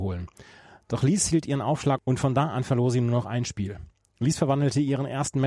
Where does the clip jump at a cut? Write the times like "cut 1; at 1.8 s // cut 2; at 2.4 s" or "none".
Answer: none